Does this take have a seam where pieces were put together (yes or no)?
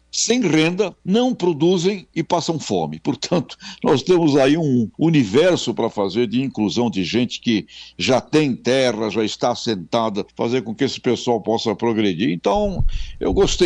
yes